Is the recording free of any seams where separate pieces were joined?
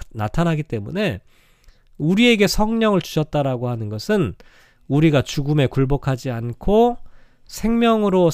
yes; 0 cuts

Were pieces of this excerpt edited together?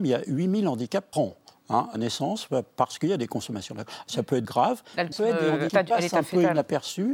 yes; 5 cuts; at 1.1 s, 1.9 s, 4.4 s, 5.1 s, 5.7 s

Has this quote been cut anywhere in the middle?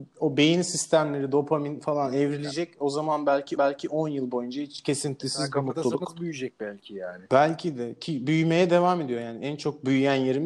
yes; 1 cut; at 3.6 s

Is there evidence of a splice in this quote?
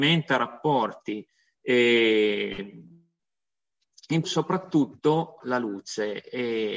yes; 2 cuts; at 4.2 s, 5.4 s

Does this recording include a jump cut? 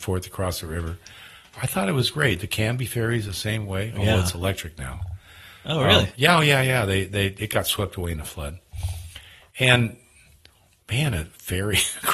no; 0 cuts

